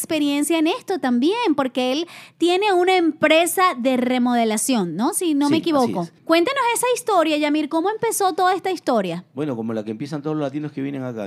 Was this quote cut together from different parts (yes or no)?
yes